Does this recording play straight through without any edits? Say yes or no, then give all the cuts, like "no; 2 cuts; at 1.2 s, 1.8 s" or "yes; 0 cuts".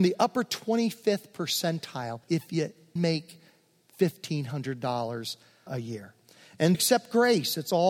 no; 4 cuts; at 2.2 s, 3.0 s, 5.7 s, 6.7 s